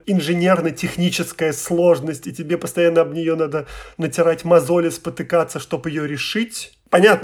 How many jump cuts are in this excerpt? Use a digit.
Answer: 0